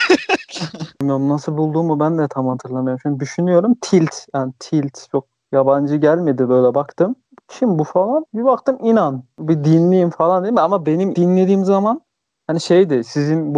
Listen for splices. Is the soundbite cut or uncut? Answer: cut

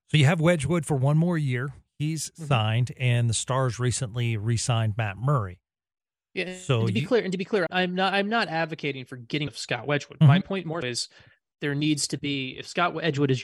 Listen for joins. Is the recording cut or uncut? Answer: cut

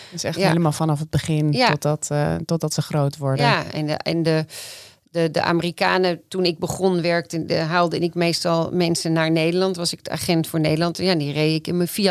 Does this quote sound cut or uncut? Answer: uncut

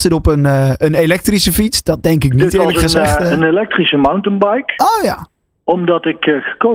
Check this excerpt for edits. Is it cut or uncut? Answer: uncut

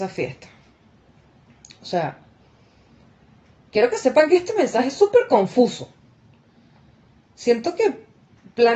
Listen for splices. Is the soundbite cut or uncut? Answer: uncut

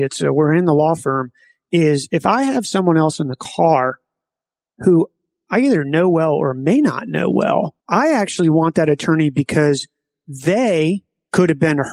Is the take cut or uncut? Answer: cut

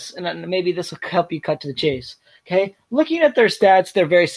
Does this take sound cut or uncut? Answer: uncut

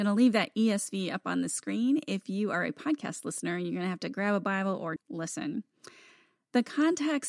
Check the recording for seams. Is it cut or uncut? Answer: cut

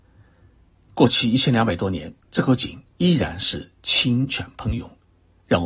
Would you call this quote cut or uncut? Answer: cut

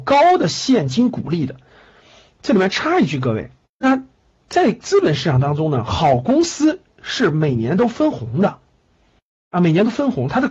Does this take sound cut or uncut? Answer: cut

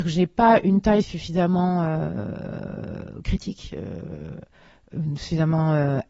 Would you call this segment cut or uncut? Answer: uncut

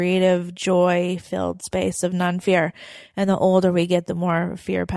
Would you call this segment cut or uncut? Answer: cut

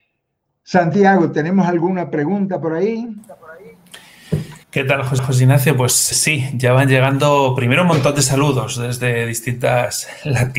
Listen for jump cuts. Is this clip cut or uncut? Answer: cut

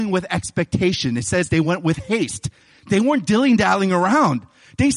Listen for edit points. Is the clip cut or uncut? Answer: uncut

